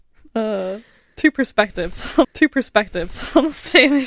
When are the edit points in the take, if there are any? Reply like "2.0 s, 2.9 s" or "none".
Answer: 2.2 s